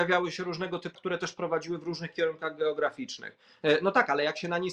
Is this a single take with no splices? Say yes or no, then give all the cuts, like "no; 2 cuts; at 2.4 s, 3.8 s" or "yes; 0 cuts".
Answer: no; 1 cut; at 0.9 s